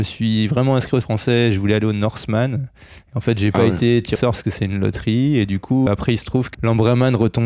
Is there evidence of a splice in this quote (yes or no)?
yes